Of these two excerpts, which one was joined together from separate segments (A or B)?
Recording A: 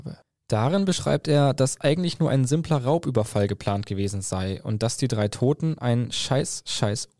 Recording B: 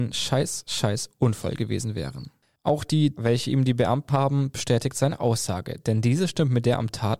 B